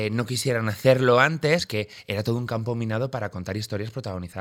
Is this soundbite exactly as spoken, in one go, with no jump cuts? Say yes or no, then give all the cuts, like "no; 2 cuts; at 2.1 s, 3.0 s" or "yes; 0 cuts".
no; 1 cut; at 1.6 s